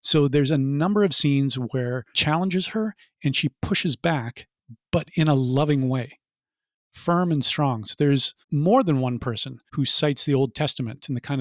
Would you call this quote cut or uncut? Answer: cut